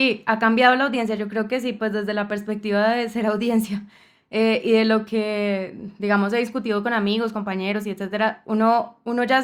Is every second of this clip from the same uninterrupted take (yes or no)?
yes